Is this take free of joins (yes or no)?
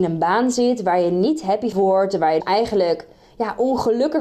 no